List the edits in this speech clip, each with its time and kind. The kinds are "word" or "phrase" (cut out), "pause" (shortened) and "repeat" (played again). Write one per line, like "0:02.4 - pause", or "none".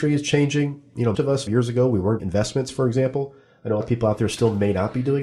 0:01.1 - word
0:01.5 - word
0:02.2 - word
0:03.8 - word